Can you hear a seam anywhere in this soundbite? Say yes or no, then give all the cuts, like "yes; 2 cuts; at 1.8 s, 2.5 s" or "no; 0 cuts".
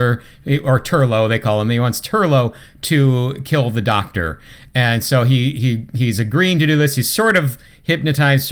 no; 0 cuts